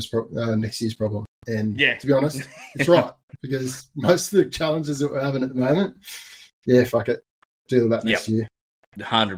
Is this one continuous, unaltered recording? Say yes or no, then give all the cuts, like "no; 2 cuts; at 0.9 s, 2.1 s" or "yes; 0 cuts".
no; 1 cut; at 1.3 s